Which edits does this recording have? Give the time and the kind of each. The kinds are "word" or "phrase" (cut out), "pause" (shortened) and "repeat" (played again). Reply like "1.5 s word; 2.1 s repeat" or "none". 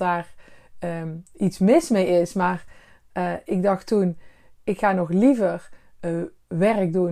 none